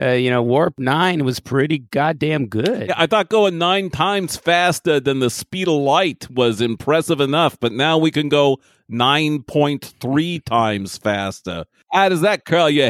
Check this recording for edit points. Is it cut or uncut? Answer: uncut